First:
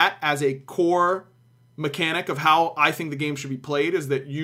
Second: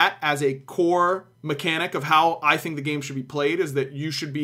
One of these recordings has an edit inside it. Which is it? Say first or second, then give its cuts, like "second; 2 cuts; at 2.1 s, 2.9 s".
second; 1 cut; at 1.3 s